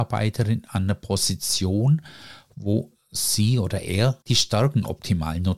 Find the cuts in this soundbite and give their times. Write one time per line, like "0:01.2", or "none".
0:04.2